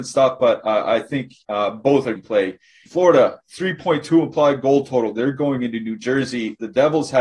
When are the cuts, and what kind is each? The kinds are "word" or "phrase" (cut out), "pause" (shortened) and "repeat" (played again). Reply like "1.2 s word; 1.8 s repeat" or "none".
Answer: 1.4 s pause; 2.2 s word; 2.9 s phrase

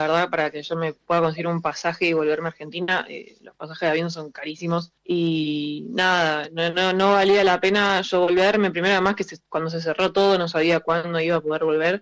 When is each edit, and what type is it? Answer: 5.0 s pause

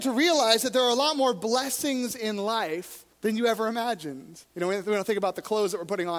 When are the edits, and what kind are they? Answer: 3.1 s pause; 4.5 s pause

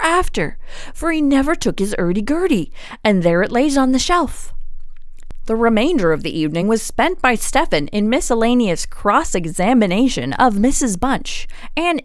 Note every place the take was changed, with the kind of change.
none

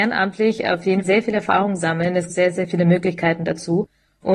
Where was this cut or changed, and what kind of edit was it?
1.0 s word; 2.3 s word

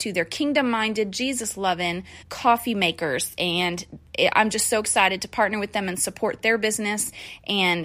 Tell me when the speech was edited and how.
2.2 s pause

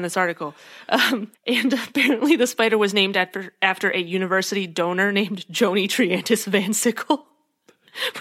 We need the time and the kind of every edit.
1.3 s pause

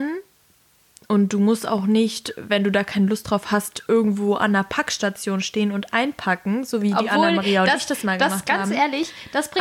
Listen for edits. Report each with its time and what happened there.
none

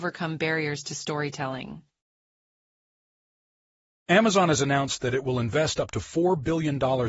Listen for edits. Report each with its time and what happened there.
none

